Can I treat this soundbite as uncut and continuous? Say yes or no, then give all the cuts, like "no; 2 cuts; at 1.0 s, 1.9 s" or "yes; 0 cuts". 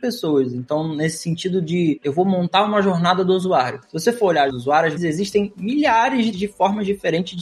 no; 4 cuts; at 2.0 s, 4.5 s, 5.0 s, 6.3 s